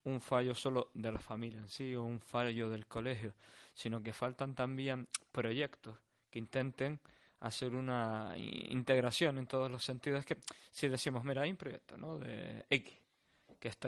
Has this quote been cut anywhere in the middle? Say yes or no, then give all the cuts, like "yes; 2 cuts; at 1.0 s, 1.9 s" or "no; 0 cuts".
no; 0 cuts